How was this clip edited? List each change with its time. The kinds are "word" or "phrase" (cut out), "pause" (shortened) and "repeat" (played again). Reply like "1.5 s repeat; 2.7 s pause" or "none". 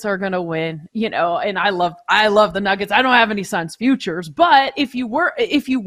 none